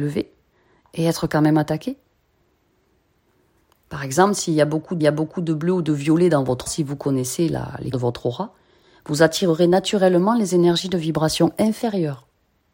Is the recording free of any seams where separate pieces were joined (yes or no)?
no